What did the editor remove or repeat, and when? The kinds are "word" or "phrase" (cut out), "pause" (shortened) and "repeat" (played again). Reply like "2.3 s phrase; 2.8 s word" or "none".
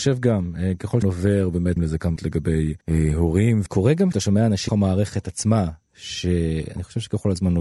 1.0 s word; 1.8 s phrase; 2.2 s word; 2.8 s pause; 3.7 s phrase; 4.1 s word; 4.7 s word

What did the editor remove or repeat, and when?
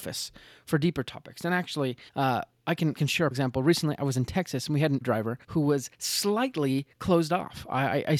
2.1 s pause; 3.0 s word; 3.3 s word; 5.0 s word; 5.4 s pause; 5.9 s pause

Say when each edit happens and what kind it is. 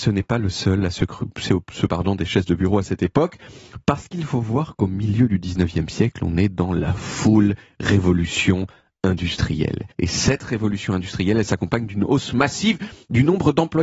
1.9 s word; 9.9 s pause

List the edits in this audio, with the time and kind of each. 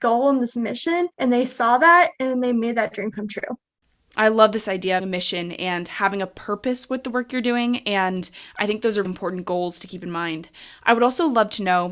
1.1 s pause; 3.8 s pause; 5.0 s phrase; 9.0 s word

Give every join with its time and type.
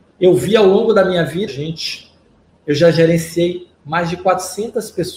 1.5 s phrase; 2.5 s pause

